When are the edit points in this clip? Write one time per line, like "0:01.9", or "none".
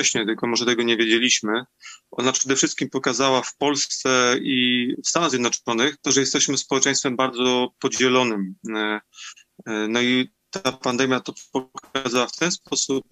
0:06.0
0:10.4